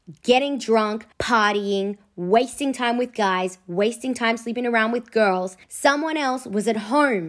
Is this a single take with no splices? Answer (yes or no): no